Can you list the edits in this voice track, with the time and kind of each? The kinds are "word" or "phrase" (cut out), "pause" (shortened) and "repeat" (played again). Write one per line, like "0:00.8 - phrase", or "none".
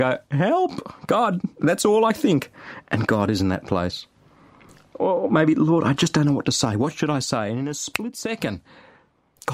none